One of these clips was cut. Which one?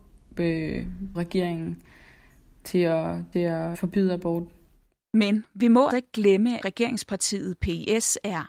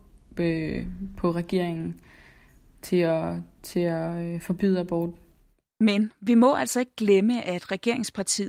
first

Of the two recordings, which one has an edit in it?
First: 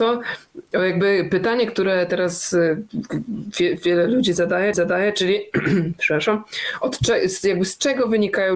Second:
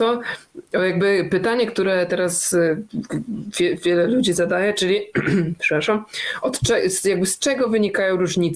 first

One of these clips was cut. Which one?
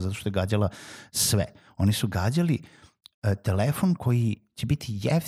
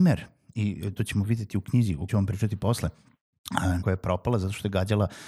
second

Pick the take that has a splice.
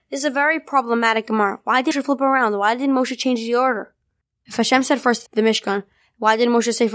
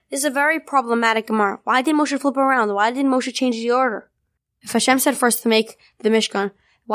first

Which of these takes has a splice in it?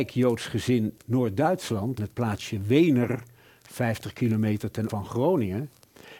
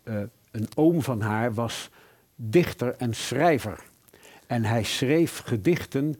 first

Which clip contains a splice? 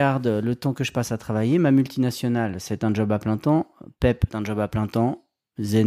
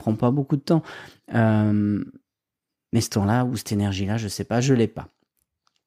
first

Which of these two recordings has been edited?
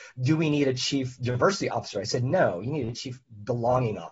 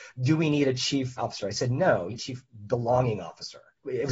second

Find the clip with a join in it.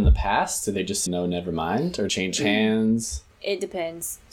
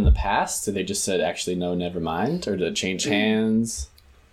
first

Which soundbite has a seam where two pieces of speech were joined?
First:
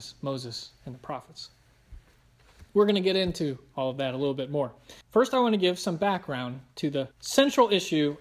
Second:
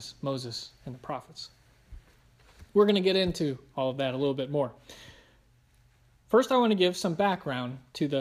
first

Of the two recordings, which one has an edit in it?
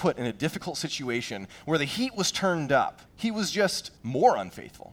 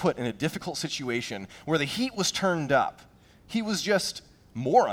first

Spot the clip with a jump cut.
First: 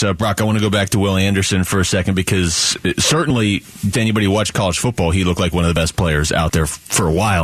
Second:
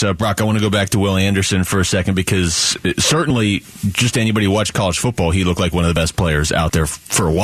first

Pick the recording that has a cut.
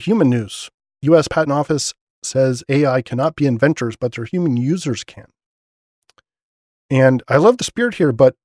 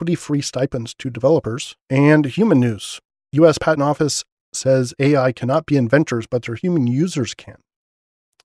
second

